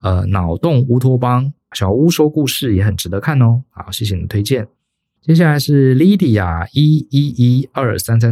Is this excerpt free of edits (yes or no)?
yes